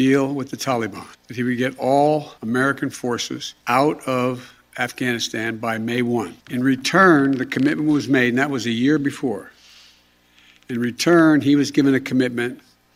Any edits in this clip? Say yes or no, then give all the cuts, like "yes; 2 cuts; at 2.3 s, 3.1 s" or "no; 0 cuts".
yes; 4 cuts; at 1.1 s, 2.4 s, 3.6 s, 6.4 s